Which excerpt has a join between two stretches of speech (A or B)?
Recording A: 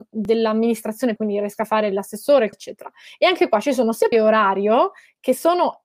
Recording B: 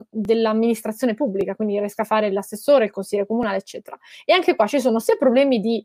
A